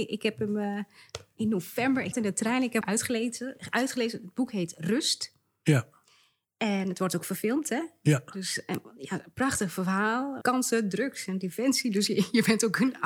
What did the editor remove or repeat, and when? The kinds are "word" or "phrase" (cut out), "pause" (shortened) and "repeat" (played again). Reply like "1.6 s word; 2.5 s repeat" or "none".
2.1 s word; 2.8 s phrase; 10.4 s word